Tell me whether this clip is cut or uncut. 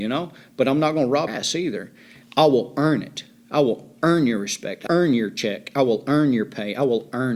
cut